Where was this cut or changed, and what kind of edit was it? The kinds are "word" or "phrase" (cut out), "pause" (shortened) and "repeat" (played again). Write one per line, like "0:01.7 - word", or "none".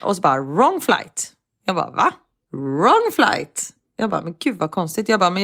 none